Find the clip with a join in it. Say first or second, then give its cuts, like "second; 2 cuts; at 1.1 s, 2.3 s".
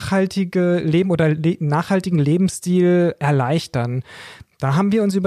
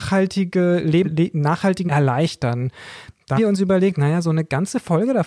second; 3 cuts; at 1.0 s, 1.9 s, 3.4 s